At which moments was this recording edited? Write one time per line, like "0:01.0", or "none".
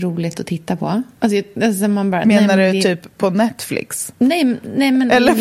0:01.2
0:04.2